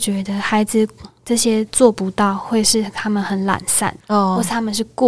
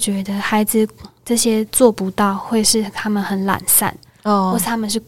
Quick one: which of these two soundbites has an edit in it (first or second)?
first